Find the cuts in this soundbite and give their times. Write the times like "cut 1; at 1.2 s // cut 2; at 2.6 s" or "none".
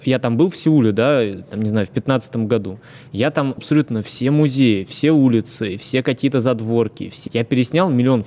cut 1; at 3.6 s // cut 2; at 7.3 s

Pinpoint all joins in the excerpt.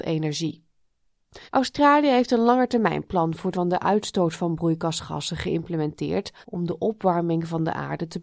cut 1; at 1.5 s // cut 2; at 3.5 s // cut 3; at 6.4 s

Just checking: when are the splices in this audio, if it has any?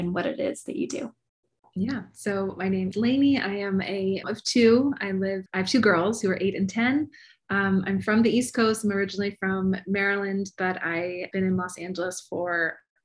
cut 1; at 2.9 s // cut 2; at 4.2 s // cut 3; at 5.5 s // cut 4; at 11.3 s

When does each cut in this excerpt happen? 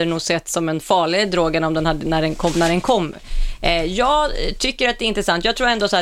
none

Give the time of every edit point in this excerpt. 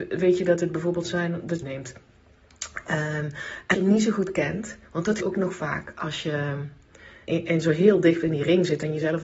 cut 1; at 1.6 s // cut 2; at 3.7 s // cut 3; at 5.2 s // cut 4; at 7.3 s

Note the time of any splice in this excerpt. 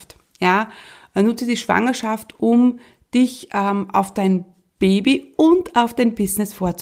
none

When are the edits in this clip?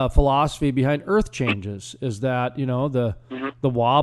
none

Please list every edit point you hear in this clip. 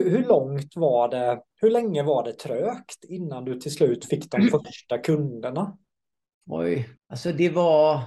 cut 1; at 7.0 s

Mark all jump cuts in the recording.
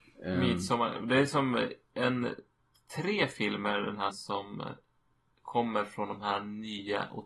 cut 1; at 4.1 s

